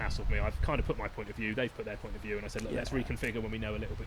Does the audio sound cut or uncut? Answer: uncut